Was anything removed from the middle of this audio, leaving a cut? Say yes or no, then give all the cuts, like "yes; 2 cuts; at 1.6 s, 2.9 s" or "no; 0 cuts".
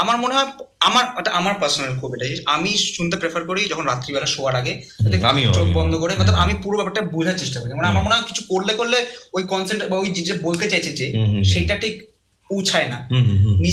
no; 0 cuts